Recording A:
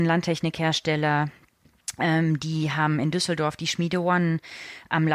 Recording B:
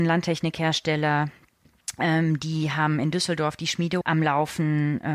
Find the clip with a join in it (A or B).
B